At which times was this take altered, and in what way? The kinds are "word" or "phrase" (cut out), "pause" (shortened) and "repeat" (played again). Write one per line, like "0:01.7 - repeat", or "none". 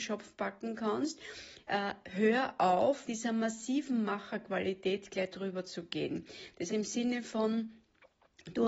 0:03.1 - word
0:06.7 - word